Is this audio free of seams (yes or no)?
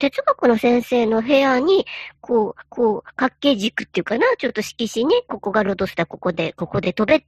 no